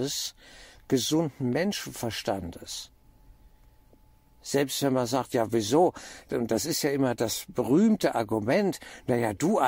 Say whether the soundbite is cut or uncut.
uncut